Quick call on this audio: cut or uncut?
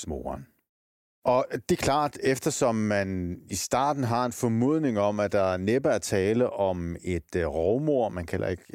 uncut